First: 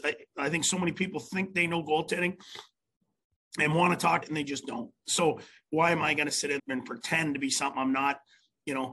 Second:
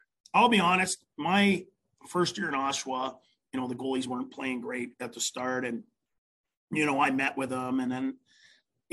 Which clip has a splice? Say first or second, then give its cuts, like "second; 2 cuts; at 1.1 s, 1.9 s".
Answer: first; 2 cuts; at 4.2 s, 6.6 s